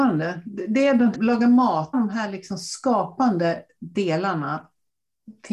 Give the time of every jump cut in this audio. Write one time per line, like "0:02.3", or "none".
0:01.1
0:01.9